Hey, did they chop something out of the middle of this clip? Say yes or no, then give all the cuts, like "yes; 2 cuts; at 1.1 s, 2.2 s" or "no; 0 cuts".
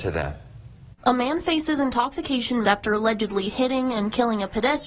yes; 2 cuts; at 1.0 s, 2.6 s